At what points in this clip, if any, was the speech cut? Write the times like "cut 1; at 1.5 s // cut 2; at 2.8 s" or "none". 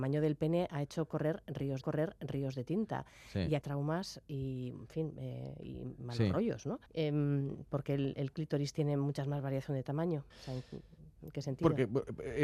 cut 1; at 1.8 s // cut 2; at 3.6 s // cut 3; at 6.9 s // cut 4; at 10.3 s